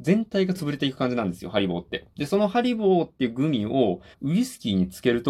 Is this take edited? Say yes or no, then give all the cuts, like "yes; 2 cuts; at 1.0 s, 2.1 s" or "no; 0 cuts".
yes; 1 cut; at 4.1 s